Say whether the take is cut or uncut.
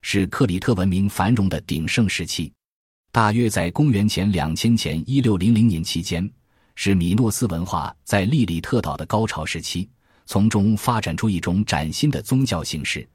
uncut